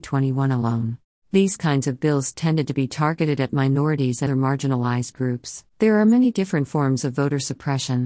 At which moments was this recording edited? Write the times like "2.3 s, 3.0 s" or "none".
1.1 s, 4.3 s, 5.7 s